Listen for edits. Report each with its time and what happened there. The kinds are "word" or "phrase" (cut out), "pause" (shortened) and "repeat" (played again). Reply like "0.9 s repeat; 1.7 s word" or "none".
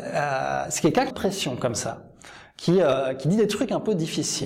1.1 s phrase

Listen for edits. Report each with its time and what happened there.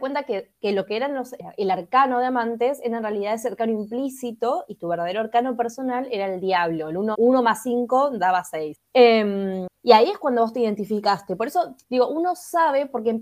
7.1 s word; 11.8 s pause

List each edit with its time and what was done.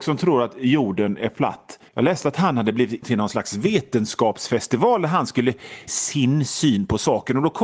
1.9 s pause; 3.0 s word; 5.9 s word

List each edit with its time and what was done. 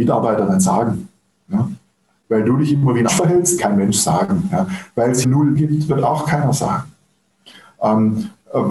3.1 s word; 3.6 s word; 5.2 s word; 5.5 s word

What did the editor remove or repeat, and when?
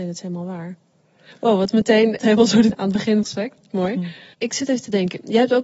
2.2 s word; 2.7 s phrase; 3.2 s word; 4.3 s pause

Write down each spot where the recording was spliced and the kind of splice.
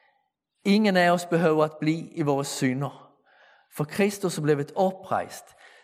none

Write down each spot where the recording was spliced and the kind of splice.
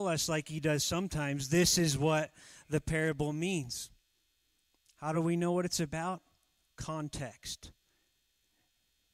none

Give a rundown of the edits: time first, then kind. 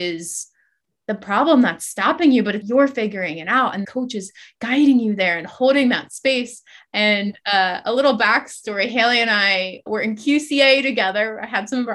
2.6 s word; 3.8 s word; 9.9 s word

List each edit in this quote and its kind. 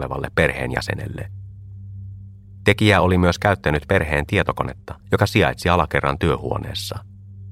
5.0 s pause

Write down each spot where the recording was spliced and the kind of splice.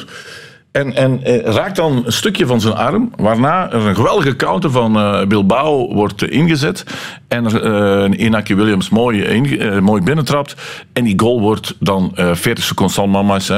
none

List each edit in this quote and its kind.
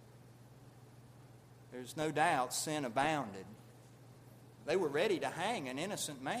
none

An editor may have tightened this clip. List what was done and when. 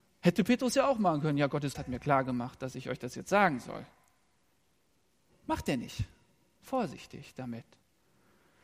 1.7 s word

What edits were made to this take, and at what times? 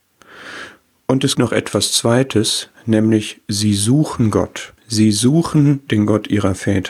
1.3 s word; 4.8 s pause

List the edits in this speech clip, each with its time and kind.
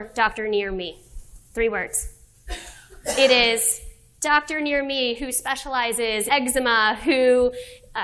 6.3 s word

